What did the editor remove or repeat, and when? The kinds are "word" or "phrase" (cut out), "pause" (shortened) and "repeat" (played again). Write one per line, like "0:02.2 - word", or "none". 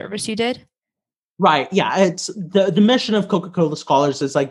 none